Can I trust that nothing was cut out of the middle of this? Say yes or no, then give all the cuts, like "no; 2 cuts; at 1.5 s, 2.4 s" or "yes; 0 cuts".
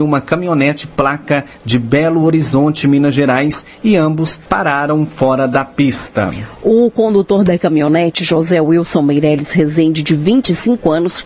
no; 1 cut; at 4.5 s